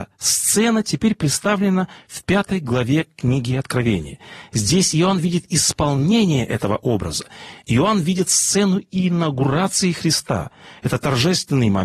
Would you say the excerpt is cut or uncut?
uncut